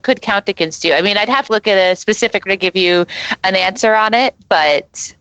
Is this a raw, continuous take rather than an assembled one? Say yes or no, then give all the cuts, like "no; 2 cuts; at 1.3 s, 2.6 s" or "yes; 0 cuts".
no; 2 cuts; at 1.5 s, 2.5 s